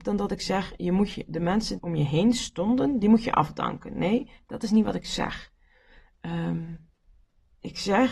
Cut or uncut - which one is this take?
cut